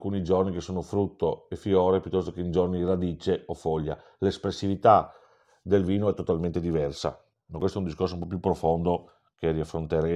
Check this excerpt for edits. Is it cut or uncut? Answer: uncut